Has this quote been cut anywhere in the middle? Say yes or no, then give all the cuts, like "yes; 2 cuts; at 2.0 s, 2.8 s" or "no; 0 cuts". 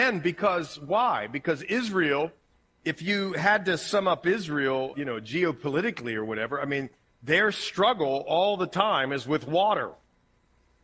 yes; 1 cut; at 4.9 s